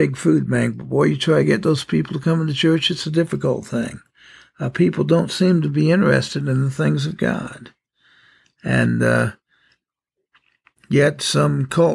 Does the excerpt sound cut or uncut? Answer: uncut